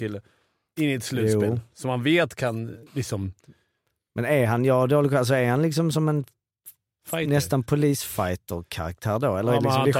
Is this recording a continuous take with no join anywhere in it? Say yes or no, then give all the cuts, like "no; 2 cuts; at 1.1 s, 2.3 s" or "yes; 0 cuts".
no; 1 cut; at 2.9 s